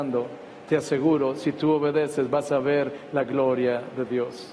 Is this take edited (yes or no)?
no